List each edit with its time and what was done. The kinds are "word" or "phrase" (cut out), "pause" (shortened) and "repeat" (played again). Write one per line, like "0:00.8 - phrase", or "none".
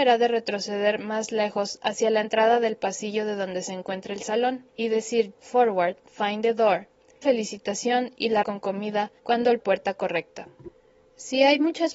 0:04.7 - pause
0:05.3 - word
0:07.2 - phrase
0:08.4 - word
0:09.2 - pause
0:09.6 - phrase

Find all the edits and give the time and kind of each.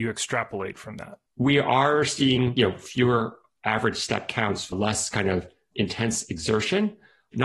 0:01.3 - pause
0:04.7 - word

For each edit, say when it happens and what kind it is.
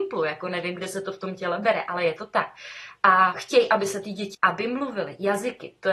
0:03.3 - word
0:04.3 - word

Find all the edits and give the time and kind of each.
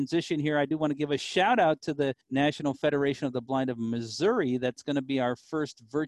0:02.2 - pause

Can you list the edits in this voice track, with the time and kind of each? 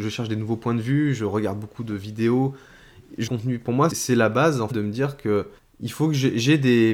0:03.3 - phrase
0:03.9 - word
0:04.7 - word
0:05.6 - pause

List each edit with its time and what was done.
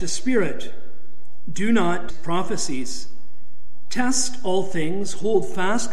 0:02.1 - word

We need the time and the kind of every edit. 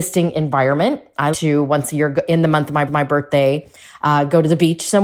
0:01.3 - word
0:02.9 - repeat

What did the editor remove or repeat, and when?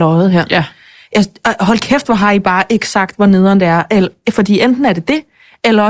none

